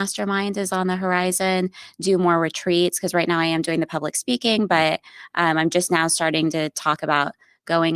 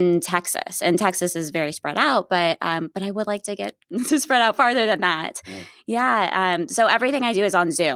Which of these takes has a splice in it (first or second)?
second